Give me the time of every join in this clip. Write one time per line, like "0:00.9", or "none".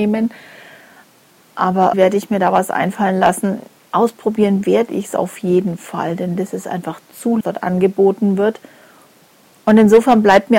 0:01.9
0:03.8
0:07.4

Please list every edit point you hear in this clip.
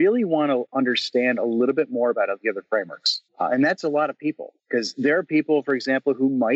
0:03.3
0:04.6

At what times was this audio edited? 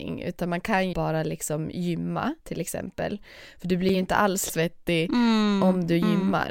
0:00.9
0:02.4
0:04.5

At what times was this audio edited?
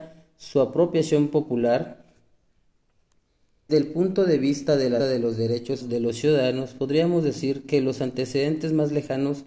0:03.7
0:05.0
0:05.8

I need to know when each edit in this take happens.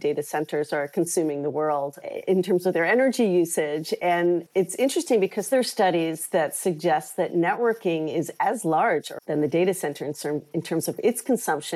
0:04.5
0:09.2

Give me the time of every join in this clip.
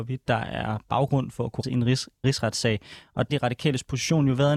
0:01.6
0:02.2
0:03.3

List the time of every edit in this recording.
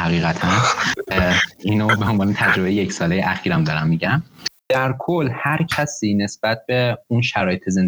0:04.6

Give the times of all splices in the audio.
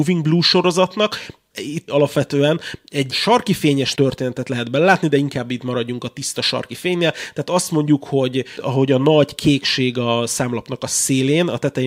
0:01.5
0:01.9
0:03.1
0:03.9

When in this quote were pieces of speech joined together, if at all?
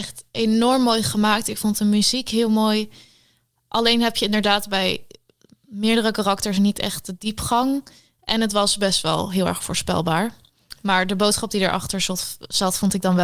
none

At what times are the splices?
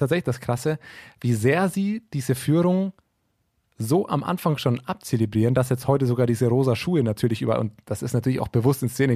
none

